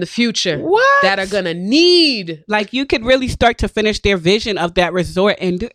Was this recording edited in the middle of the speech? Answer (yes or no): no